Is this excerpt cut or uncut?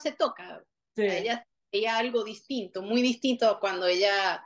uncut